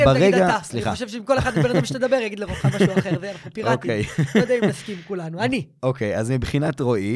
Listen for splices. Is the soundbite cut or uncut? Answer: uncut